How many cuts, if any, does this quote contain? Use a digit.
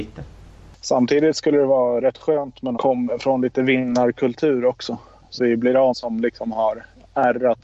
3